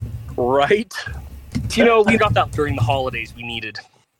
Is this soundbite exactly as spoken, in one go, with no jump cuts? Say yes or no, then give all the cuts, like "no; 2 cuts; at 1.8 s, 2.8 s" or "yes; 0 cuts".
no; 3 cuts; at 1.7 s, 2.2 s, 2.5 s